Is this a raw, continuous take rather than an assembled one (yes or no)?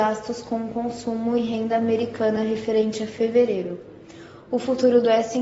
yes